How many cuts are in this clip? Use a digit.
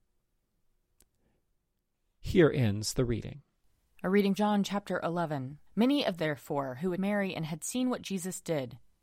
5